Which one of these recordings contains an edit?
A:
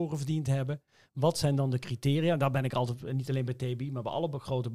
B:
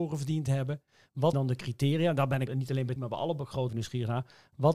B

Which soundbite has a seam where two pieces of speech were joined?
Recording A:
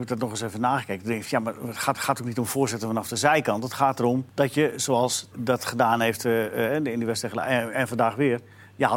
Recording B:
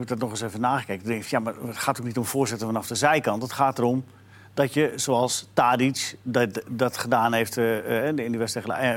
A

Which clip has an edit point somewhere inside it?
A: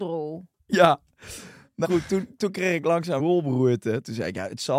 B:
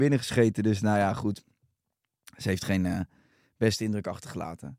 A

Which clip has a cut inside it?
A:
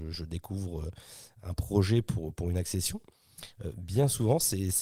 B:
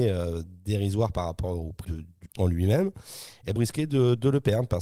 B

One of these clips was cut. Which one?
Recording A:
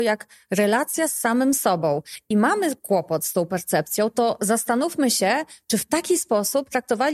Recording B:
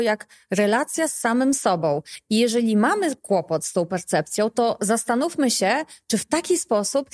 A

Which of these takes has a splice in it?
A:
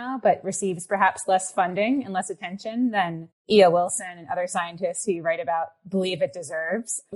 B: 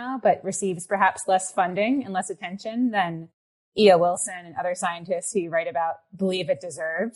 A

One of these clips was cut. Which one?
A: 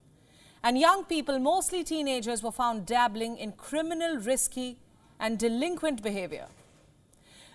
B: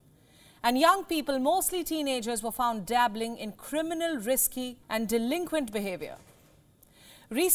B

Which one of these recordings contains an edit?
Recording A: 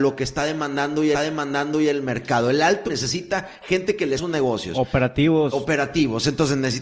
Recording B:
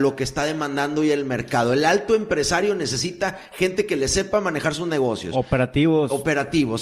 A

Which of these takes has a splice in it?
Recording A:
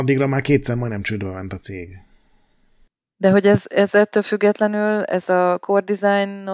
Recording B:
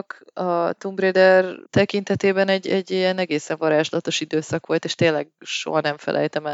B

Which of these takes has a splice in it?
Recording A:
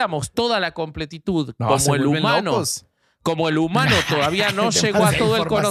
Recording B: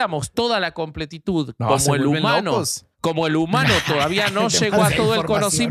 B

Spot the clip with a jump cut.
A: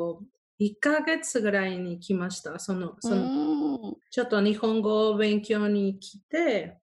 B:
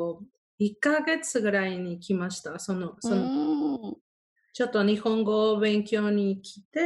A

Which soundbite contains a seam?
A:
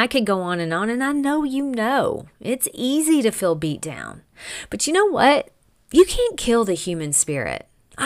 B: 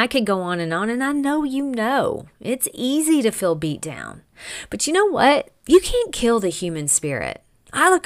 B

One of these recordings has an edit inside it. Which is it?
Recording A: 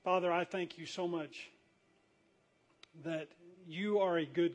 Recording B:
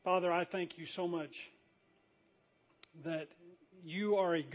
A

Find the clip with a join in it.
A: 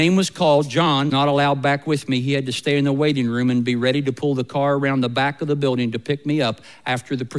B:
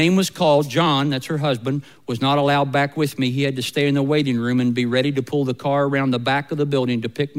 A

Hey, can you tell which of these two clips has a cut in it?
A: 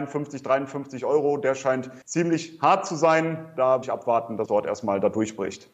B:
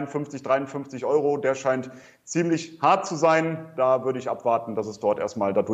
A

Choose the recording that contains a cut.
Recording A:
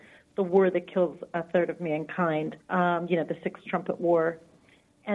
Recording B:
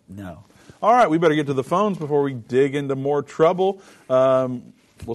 A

